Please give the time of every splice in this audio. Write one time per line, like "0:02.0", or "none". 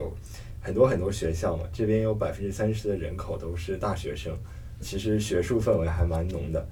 0:04.8